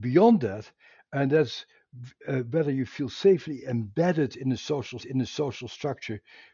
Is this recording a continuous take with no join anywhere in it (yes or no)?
no